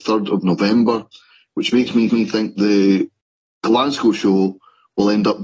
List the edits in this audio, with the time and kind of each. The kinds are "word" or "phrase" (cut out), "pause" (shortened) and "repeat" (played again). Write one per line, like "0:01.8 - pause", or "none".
0:02.1 - repeat
0:03.2 - pause